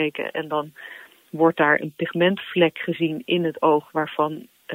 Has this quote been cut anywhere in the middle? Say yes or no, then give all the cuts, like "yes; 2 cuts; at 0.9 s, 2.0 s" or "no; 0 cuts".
no; 0 cuts